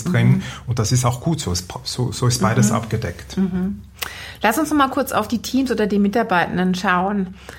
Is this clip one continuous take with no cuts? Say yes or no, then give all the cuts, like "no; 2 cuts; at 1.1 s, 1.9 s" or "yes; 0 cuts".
yes; 0 cuts